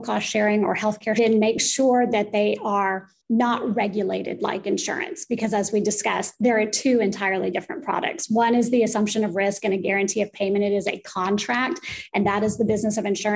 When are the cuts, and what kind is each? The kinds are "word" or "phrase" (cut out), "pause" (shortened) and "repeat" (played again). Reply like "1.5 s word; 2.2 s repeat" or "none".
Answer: 1.2 s phrase